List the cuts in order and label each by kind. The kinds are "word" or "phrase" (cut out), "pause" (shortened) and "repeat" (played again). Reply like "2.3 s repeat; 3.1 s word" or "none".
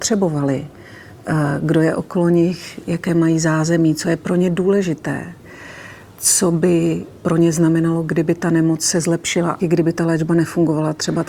2.8 s word; 9.6 s phrase